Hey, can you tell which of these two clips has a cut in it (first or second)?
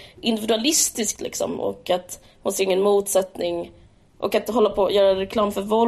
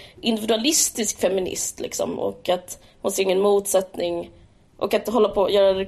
first